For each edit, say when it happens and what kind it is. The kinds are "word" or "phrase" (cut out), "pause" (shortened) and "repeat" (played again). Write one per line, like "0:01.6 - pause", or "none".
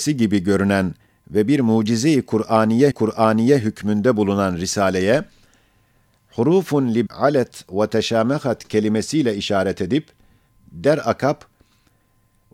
0:02.9 - repeat
0:07.1 - word